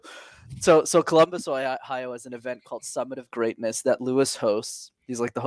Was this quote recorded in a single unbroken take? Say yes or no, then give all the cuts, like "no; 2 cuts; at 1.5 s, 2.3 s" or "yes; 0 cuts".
yes; 0 cuts